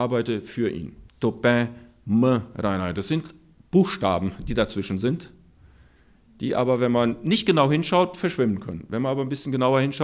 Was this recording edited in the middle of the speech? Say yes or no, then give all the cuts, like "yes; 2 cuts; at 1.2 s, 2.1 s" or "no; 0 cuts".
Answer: yes; 1 cut; at 1.1 s